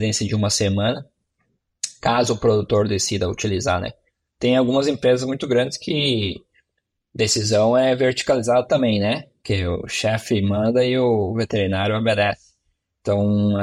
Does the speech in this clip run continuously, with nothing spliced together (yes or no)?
yes